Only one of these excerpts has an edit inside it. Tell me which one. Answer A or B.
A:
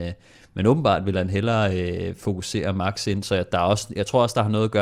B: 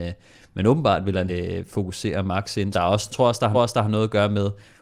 B